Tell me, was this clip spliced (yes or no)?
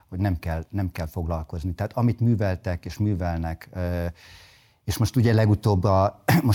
no